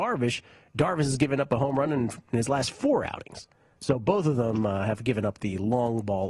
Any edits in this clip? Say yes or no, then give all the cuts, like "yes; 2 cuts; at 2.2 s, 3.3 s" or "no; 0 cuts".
no; 0 cuts